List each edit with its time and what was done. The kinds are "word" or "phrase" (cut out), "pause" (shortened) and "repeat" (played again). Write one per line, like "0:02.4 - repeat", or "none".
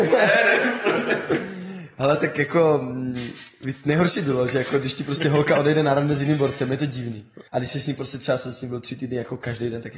0:07.5 - pause